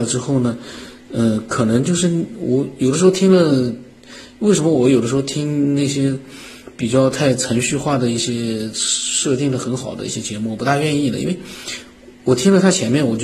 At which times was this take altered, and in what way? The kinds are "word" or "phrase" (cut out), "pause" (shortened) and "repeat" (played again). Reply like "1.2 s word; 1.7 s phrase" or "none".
none